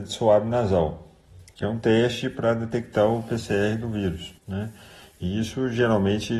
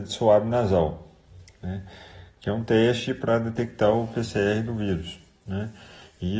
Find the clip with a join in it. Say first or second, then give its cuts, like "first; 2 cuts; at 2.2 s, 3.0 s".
first; 2 cuts; at 1.5 s, 4.4 s